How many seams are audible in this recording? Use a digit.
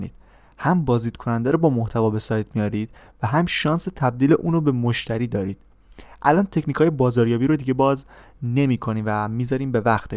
0